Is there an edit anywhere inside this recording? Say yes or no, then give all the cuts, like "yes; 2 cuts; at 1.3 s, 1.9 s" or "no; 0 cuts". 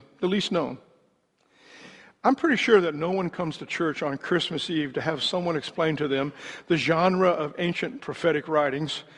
no; 0 cuts